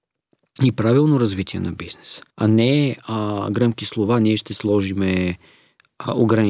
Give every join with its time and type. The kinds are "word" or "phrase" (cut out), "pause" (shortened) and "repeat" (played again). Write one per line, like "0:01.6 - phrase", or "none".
0:02.3 - pause